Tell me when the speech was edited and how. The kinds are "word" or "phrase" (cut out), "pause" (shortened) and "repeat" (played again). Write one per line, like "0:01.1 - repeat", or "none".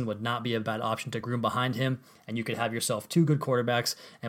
none

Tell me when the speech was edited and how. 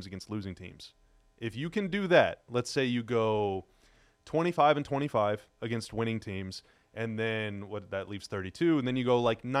none

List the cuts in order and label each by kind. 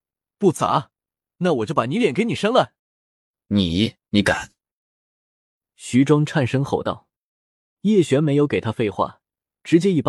0:02.8 - pause
0:04.0 - pause

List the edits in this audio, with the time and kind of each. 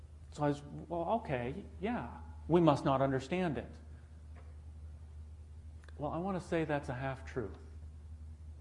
none

